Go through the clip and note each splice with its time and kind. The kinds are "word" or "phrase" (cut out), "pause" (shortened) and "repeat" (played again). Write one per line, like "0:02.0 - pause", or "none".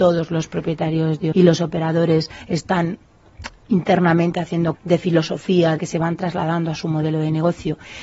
0:01.3 - word
0:04.7 - word
0:05.8 - word